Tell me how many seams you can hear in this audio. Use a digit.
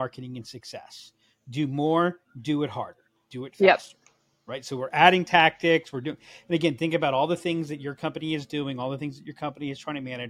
0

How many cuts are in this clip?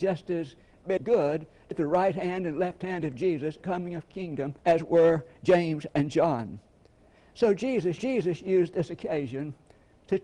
5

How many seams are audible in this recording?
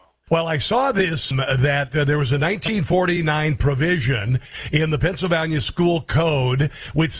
1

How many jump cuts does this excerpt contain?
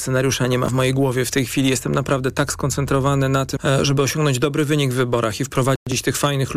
1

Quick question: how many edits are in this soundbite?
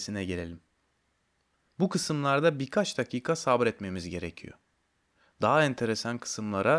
0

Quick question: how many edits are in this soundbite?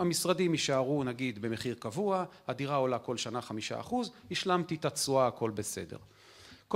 0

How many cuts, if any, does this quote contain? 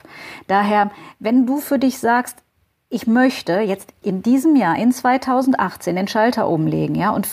1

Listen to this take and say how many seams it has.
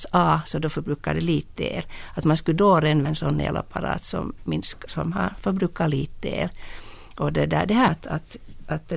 3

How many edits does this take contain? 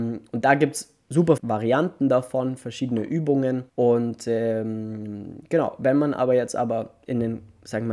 2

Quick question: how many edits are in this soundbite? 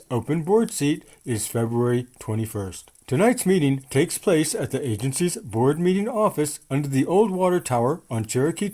0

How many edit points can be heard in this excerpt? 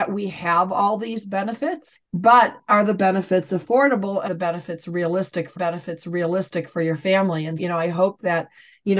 4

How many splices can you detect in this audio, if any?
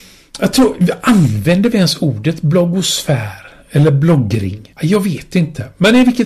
1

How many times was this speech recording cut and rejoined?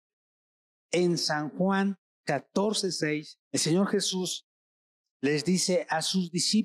1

